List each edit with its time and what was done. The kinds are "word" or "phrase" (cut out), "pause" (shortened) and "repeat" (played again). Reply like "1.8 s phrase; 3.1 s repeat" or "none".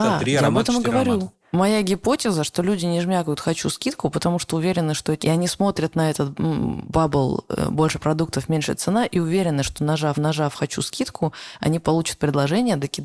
1.4 s pause; 5.2 s phrase; 10.1 s repeat